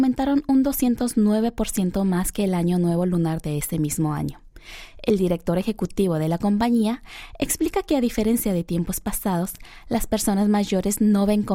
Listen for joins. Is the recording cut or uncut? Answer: uncut